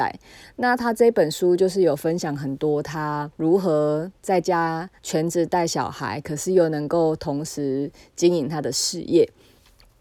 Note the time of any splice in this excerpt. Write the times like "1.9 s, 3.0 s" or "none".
3.3 s, 5.0 s